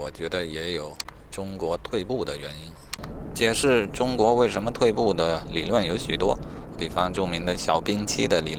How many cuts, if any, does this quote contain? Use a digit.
1